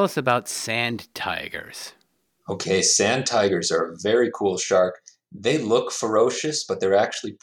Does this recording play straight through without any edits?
yes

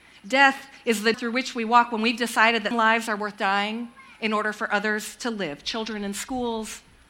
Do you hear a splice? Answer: yes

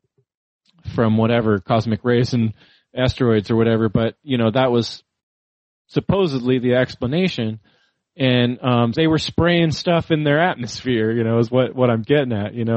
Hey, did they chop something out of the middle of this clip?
yes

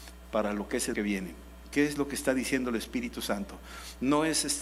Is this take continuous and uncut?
no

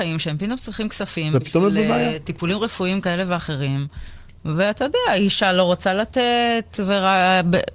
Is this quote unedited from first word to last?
yes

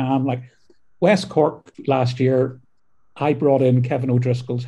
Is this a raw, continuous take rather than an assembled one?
yes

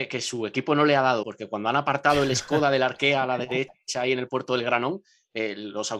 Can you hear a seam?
yes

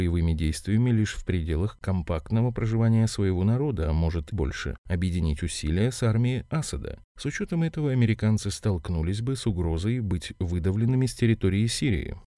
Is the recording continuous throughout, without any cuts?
no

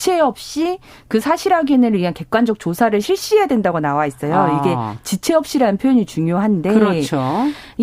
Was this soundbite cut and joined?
no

